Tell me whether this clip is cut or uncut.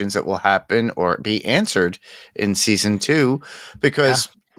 uncut